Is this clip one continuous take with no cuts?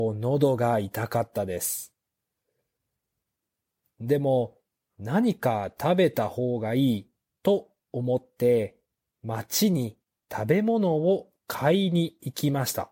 yes; 0 cuts

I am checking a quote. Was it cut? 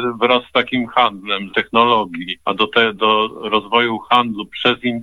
yes; 3 cuts; at 1.5 s, 2.4 s, 3.0 s

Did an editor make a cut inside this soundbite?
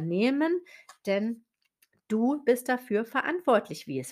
no; 0 cuts

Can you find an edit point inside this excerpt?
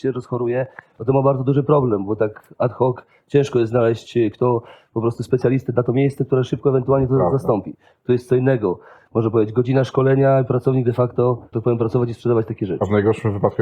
yes; 2 cuts; at 4.3 s, 11.5 s

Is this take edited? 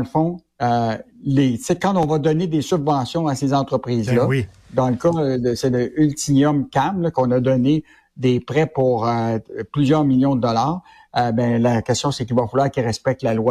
no; 0 cuts

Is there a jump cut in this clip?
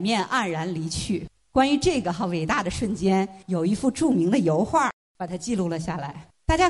yes; 1 cut; at 3.4 s

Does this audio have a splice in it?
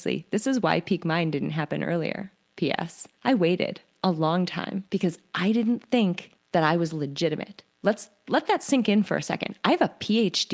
yes; 4 cuts; at 3.1 s, 4.9 s, 6.4 s, 7.7 s

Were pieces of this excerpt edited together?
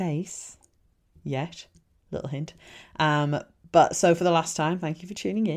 no; 0 cuts

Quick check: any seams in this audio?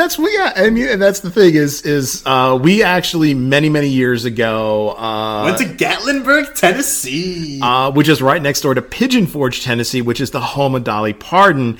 no; 0 cuts

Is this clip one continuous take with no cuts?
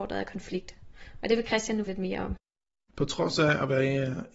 no; 1 cut; at 1.9 s

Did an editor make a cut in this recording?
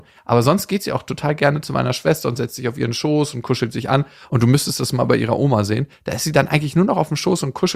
no; 0 cuts

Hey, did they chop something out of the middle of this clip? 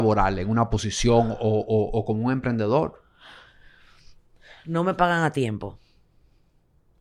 no; 0 cuts

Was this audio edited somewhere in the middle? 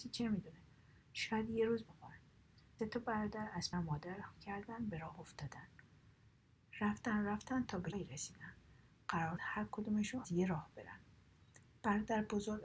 yes; 7 cuts; at 1.9 s, 2.8 s, 3.7 s, 4.4 s, 7.9 s, 9.4 s, 10.2 s

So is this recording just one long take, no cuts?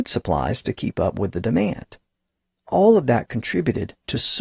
yes; 0 cuts

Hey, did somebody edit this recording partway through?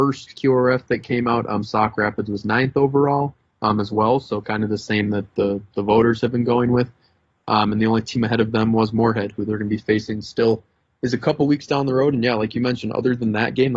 no; 0 cuts

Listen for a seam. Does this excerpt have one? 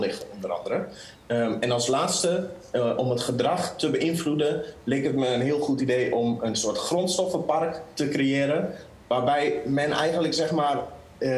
no; 0 cuts

